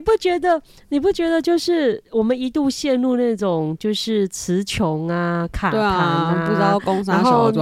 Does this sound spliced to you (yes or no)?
no